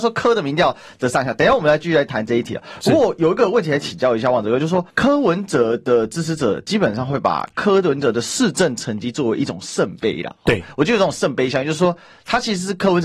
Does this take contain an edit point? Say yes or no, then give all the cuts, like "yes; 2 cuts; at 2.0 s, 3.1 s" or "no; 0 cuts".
yes; 1 cut; at 4.9 s